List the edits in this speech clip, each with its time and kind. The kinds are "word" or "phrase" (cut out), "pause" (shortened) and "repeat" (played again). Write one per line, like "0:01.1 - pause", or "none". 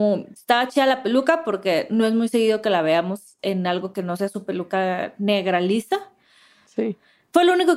none